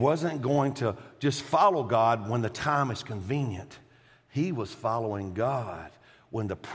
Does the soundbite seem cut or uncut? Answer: uncut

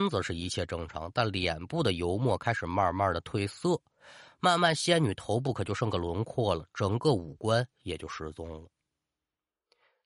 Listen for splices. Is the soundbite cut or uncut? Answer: cut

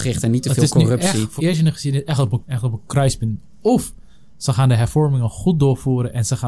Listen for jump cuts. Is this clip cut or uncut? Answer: cut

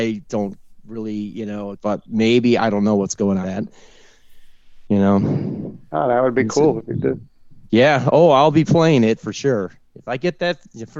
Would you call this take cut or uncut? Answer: cut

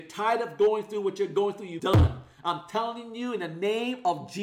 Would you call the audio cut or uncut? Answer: cut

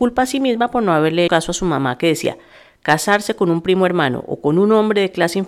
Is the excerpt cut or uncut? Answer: cut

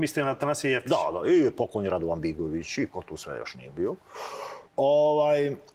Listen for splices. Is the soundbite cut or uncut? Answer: cut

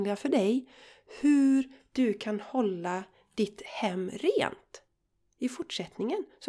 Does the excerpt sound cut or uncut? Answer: uncut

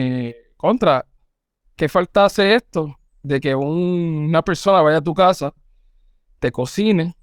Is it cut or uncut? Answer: uncut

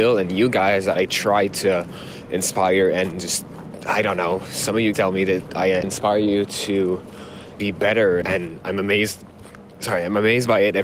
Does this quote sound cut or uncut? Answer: cut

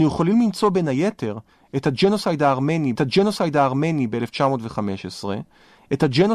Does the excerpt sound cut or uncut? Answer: cut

